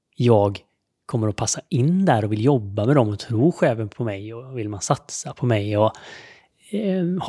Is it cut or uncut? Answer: uncut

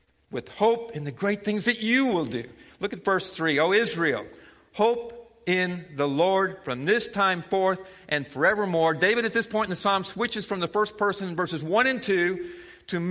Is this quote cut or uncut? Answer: uncut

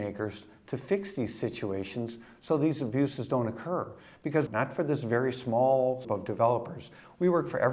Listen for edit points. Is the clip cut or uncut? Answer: cut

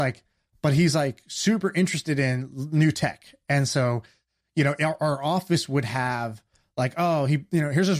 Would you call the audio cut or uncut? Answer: uncut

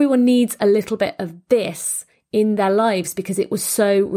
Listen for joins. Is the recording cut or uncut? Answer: uncut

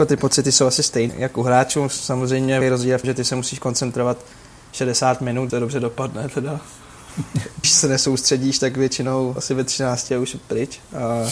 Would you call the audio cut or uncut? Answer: cut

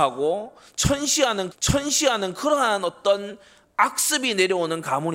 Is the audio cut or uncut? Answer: cut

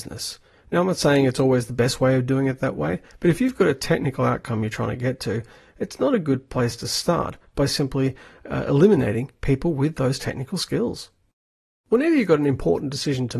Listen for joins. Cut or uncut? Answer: uncut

